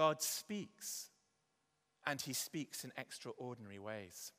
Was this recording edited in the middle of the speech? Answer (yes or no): no